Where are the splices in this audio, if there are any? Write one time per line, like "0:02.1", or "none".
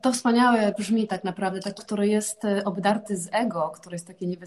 0:01.8